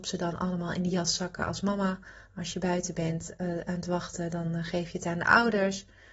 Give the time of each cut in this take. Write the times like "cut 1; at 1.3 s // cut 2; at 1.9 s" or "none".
none